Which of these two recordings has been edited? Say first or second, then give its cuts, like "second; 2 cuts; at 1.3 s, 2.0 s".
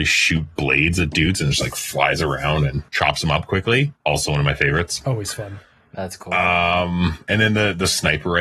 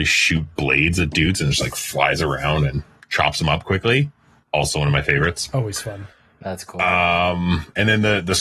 first; 2 cuts; at 2.9 s, 4.0 s